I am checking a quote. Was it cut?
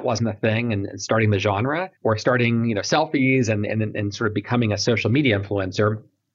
yes; 1 cut; at 1.9 s

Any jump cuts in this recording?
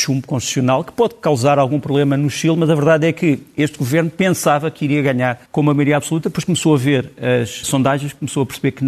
yes; 2 cuts; at 5.5 s, 7.6 s

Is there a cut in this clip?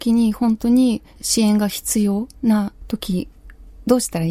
yes; 1 cut; at 2.4 s

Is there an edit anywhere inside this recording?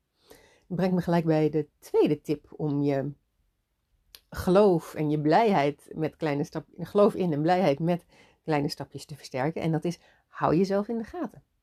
yes; 1 cut; at 5.9 s

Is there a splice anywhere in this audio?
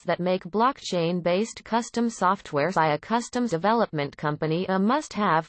yes; 2 cuts; at 2.7 s, 3.5 s

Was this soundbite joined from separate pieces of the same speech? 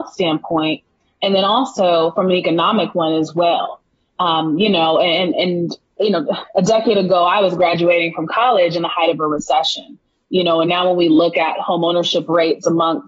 no; 0 cuts

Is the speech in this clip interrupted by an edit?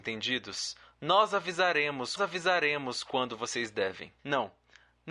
yes; 2 cuts; at 2.2 s, 4.2 s

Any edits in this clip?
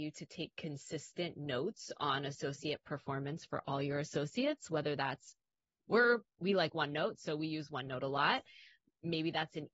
yes; 1 cut; at 6.3 s

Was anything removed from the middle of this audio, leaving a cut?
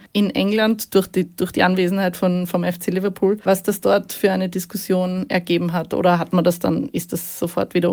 no; 0 cuts

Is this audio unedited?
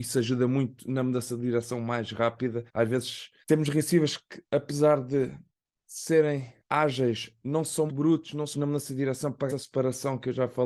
no; 7 cuts; at 2.7 s, 3.4 s, 4.5 s, 6.6 s, 7.9 s, 8.5 s, 9.5 s

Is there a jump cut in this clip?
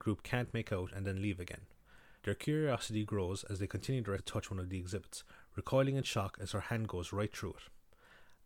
yes; 2 cuts; at 2.2 s, 4.2 s

